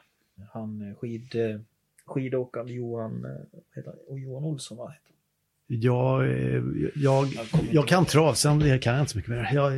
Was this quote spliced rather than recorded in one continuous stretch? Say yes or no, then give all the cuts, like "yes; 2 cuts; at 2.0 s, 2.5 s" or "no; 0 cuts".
no; 0 cuts